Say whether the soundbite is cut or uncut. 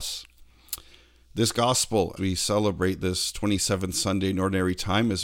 cut